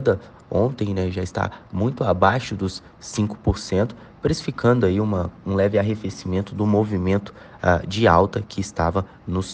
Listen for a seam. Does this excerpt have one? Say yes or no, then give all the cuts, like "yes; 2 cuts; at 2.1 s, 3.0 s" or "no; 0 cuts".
no; 0 cuts